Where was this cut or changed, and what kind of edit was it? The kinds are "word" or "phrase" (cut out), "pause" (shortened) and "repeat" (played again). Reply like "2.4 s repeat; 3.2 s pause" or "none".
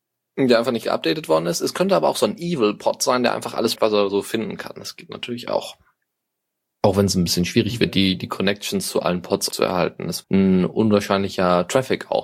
3.8 s word; 9.5 s word; 10.2 s word